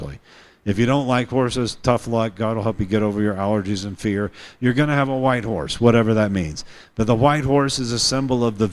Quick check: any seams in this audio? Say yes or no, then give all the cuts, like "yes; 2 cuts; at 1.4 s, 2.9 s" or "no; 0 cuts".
no; 0 cuts